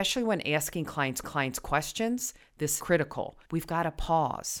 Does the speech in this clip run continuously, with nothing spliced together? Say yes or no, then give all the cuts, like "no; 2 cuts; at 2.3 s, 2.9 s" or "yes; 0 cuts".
no; 3 cuts; at 1.2 s, 2.8 s, 3.4 s